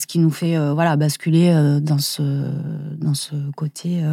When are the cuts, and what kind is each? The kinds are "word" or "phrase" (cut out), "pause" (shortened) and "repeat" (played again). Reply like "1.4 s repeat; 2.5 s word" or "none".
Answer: none